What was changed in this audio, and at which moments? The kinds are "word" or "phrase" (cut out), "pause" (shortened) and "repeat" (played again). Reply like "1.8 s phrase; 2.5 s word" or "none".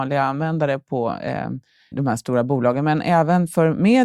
1.9 s word